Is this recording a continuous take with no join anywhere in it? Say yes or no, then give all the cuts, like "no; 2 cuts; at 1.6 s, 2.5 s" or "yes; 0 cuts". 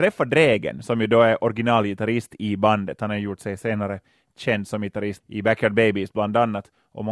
no; 1 cut; at 5.2 s